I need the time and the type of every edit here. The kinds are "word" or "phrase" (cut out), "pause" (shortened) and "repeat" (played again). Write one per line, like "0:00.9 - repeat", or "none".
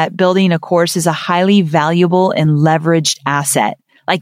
none